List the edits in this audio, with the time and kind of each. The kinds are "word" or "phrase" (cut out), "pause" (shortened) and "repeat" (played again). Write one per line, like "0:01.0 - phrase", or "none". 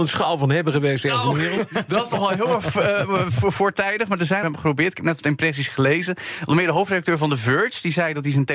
0:04.4 - phrase